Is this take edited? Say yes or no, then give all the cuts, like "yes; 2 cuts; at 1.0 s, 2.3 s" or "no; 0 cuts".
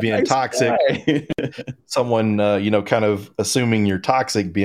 no; 0 cuts